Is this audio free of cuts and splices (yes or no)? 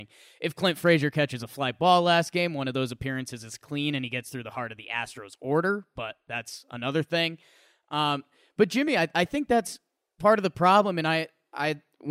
yes